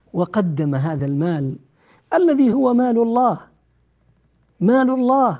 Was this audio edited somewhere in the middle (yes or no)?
no